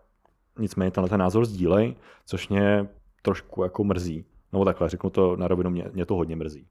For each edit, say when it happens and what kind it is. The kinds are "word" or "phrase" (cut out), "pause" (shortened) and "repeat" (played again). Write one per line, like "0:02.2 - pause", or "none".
none